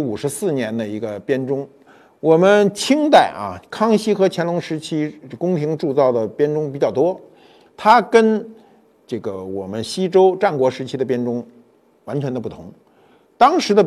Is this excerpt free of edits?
yes; 0 cuts

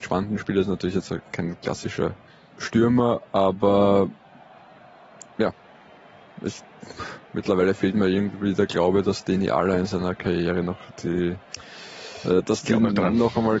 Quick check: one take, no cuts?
no; 3 cuts; at 2.3 s, 5.3 s, 7.2 s

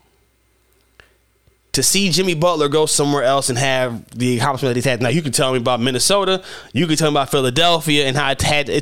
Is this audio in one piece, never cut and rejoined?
yes; 0 cuts

